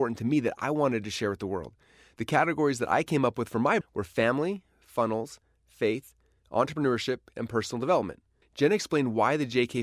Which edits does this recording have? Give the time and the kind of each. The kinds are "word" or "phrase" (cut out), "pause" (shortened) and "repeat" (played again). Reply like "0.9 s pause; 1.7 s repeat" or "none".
3.8 s word; 8.4 s pause